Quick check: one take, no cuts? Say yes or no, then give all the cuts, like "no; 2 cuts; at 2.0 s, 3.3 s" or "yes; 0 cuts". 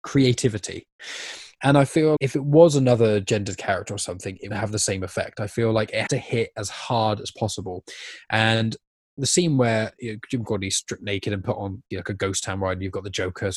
no; 4 cuts; at 2.2 s, 4.5 s, 6.1 s, 11.9 s